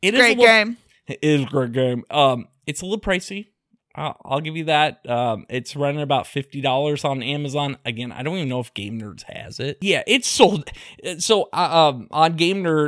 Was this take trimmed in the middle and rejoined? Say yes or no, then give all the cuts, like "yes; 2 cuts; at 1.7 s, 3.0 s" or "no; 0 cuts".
no; 0 cuts